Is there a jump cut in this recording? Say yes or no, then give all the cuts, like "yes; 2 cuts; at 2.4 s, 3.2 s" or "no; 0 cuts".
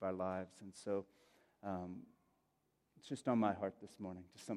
no; 0 cuts